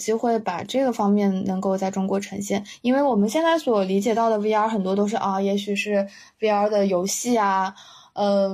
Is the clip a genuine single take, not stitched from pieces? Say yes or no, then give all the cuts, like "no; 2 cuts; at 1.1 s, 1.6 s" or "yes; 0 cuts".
yes; 0 cuts